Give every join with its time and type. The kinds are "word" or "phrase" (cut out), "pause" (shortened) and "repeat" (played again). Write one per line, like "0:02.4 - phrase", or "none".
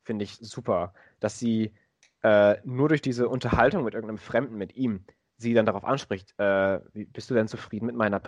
none